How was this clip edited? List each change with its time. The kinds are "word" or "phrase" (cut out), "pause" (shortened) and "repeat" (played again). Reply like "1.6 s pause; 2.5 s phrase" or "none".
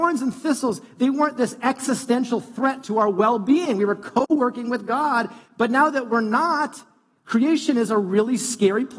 none